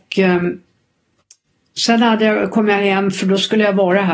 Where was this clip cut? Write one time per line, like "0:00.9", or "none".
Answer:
none